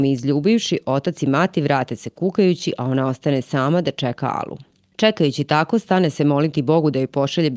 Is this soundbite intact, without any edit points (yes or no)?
yes